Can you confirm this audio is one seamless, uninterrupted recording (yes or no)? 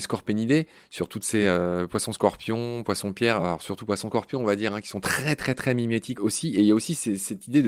yes